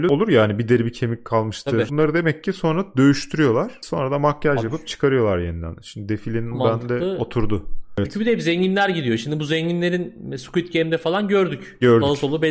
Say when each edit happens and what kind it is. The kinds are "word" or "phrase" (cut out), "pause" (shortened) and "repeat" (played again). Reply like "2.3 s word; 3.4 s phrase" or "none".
6.5 s word